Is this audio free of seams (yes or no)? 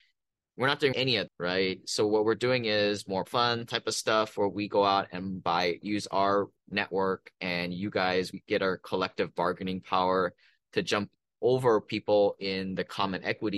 no